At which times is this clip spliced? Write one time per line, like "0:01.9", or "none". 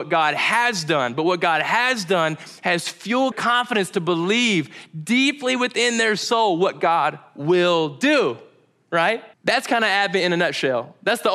0:03.3
0:09.3